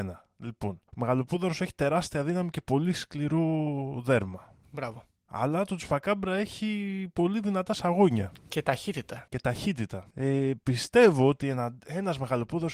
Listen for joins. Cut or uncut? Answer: cut